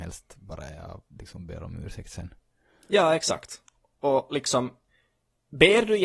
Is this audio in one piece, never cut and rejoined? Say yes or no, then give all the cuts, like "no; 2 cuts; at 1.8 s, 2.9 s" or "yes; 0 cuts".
yes; 0 cuts